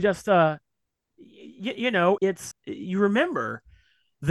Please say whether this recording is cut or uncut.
cut